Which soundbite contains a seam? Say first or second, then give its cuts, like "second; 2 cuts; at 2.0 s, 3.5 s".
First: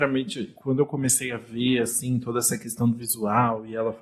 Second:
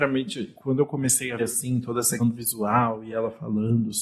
second; 2 cuts; at 1.4 s, 2.2 s